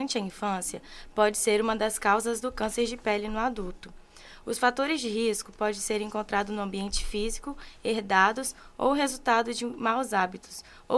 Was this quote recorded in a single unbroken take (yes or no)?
yes